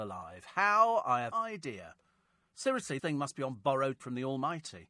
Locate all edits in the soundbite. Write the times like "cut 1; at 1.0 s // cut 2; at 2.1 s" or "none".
cut 1; at 1.3 s // cut 2; at 3.0 s // cut 3; at 4.0 s